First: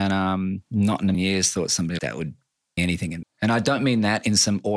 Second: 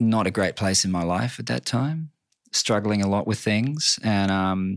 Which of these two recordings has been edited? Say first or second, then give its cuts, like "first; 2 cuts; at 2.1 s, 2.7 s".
first; 4 cuts; at 1.1 s, 2.0 s, 2.8 s, 3.2 s